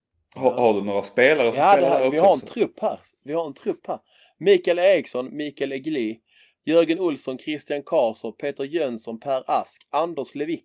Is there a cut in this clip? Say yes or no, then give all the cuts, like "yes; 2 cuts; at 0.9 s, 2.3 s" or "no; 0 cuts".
no; 0 cuts